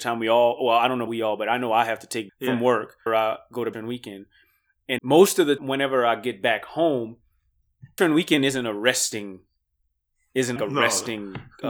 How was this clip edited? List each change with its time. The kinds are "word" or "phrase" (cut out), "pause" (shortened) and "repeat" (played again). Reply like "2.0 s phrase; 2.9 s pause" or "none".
1.1 s word; 2.3 s word; 3.1 s word; 3.7 s word; 5.0 s word; 5.6 s word; 8.0 s word; 10.6 s word